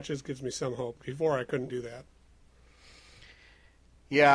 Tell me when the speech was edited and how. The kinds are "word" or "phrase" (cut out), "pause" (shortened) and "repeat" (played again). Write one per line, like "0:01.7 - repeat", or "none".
0:01.0 - word
0:01.7 - word